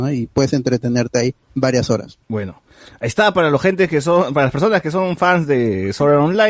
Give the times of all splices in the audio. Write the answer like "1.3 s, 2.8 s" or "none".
1.4 s, 2.2 s